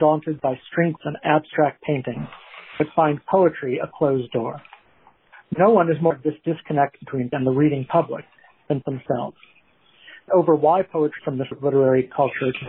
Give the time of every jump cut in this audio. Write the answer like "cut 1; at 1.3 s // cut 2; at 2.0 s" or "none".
cut 1; at 1.0 s // cut 2; at 6.1 s // cut 3; at 7.3 s // cut 4; at 8.8 s // cut 5; at 10.3 s // cut 6; at 11.2 s // cut 7; at 11.5 s